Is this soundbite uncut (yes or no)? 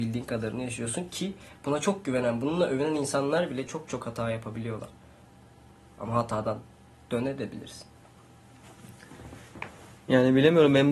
yes